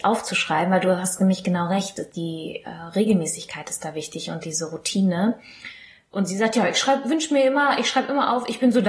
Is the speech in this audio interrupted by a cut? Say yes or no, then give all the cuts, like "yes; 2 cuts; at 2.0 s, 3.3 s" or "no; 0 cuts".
no; 0 cuts